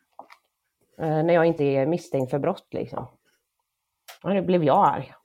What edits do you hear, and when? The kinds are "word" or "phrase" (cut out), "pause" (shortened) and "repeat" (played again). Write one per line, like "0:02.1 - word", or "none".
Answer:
0:01.6 - word
0:04.2 - pause